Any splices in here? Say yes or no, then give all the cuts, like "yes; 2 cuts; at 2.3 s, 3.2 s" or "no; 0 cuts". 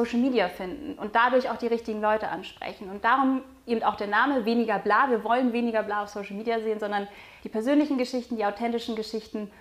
no; 0 cuts